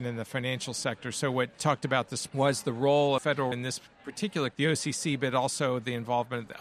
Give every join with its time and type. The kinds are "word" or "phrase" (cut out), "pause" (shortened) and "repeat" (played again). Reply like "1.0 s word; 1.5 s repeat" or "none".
1.6 s word; 2.3 s word; 3.2 s word; 3.5 s word; 4.5 s word